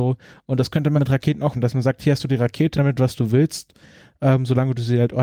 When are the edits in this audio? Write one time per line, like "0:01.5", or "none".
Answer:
0:01.0
0:01.5
0:02.7